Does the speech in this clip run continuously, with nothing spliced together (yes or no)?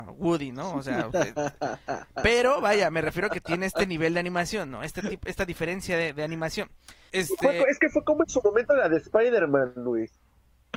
no